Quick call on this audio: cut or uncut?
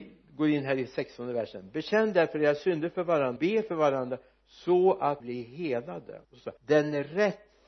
cut